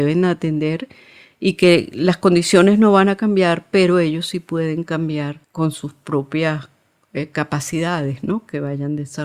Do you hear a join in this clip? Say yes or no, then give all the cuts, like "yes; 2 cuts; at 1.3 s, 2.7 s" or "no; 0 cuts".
yes; 1 cut; at 5.4 s